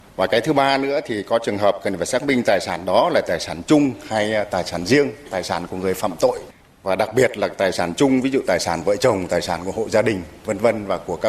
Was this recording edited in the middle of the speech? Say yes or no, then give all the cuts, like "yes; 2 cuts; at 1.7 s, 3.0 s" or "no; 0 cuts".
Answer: no; 0 cuts